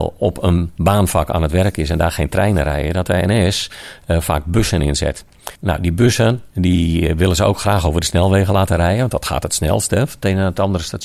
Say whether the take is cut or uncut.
cut